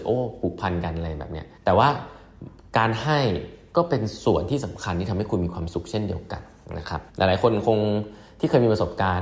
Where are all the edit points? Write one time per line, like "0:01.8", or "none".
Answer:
0:01.6
0:02.6
0:07.1